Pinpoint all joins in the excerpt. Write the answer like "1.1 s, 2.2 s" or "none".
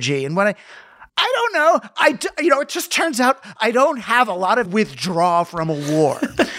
1.1 s, 4.7 s